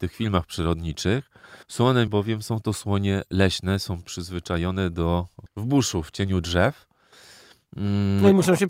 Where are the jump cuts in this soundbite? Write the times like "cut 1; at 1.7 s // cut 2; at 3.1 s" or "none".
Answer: cut 1; at 1.6 s // cut 2; at 2.1 s // cut 3; at 5.5 s